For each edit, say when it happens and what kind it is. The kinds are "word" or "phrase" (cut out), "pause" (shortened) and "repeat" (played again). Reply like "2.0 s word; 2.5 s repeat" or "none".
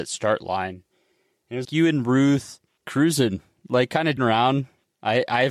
1.6 s word; 2.8 s word; 4.2 s word